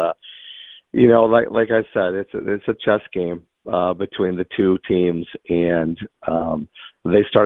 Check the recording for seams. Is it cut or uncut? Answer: uncut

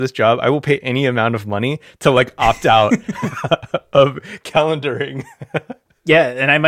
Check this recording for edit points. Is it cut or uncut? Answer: uncut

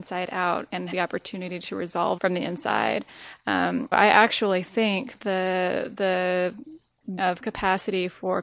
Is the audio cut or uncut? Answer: cut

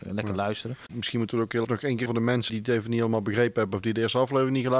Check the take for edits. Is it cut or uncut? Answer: cut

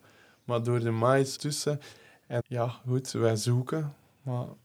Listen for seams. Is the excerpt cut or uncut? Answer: cut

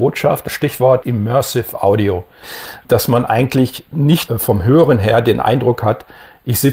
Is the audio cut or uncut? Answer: cut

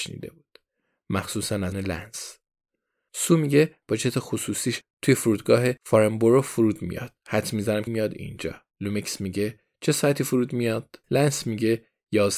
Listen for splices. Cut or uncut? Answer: cut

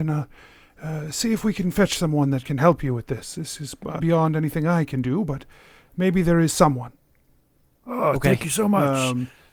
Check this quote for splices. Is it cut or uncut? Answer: cut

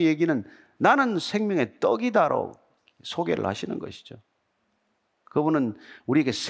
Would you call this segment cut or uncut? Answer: uncut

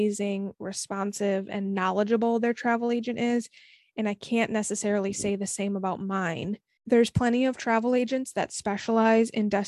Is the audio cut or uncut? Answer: cut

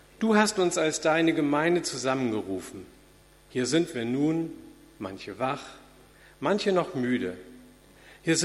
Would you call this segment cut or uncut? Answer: uncut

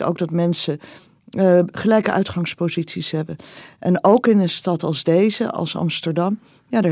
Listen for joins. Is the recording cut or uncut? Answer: uncut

